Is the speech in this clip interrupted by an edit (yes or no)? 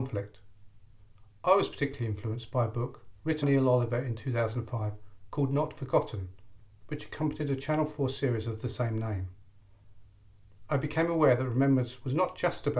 yes